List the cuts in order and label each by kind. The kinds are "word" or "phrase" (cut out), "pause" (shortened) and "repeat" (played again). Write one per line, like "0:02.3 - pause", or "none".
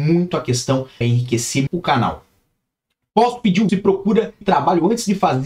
0:01.0 - word
0:01.7 - word
0:03.7 - word
0:04.4 - word